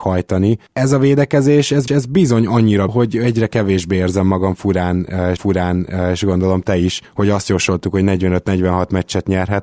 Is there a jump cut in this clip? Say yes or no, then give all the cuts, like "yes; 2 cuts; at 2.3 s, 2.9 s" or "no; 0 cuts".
yes; 3 cuts; at 1.9 s, 2.9 s, 5.4 s